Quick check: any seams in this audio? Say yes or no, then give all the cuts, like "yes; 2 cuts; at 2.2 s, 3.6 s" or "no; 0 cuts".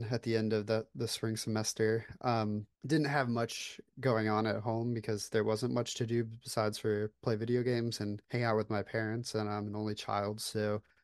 yes; 2 cuts; at 2.7 s, 8.2 s